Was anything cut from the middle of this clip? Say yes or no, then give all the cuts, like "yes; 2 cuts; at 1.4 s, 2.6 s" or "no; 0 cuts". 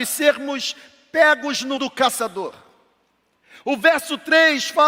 yes; 1 cut; at 1.8 s